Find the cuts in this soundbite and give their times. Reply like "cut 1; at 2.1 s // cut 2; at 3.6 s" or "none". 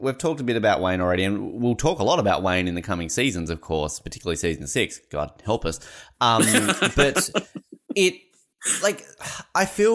none

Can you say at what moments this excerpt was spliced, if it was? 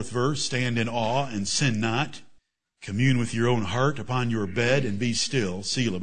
cut 1; at 2.4 s

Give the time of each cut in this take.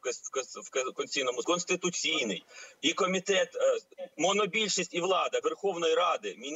cut 1; at 1.4 s // cut 2; at 2.8 s // cut 3; at 4.1 s // cut 4; at 5.4 s

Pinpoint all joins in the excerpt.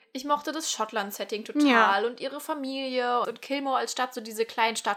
cut 1; at 3.2 s

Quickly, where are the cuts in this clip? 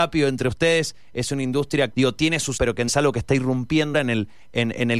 cut 1; at 1.9 s // cut 2; at 2.6 s // cut 3; at 2.9 s // cut 4; at 3.9 s

